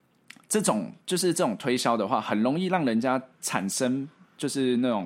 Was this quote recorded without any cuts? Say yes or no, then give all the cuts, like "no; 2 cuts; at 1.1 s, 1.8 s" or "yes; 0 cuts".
no; 2 cuts; at 1.0 s, 3.3 s